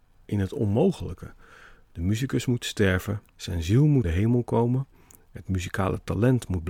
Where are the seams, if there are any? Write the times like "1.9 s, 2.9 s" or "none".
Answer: 3.3 s, 4.0 s